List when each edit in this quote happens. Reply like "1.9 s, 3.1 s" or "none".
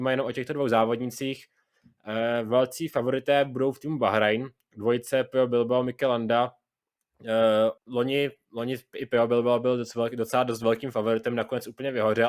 7.8 s